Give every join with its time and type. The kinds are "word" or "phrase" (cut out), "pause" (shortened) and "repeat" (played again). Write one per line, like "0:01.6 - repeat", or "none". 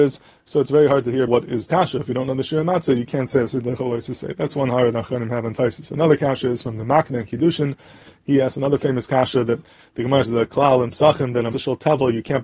0:01.3 - word
0:01.7 - word
0:10.3 - word
0:11.5 - word